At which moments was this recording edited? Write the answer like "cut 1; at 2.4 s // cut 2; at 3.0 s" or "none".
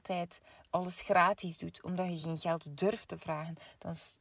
none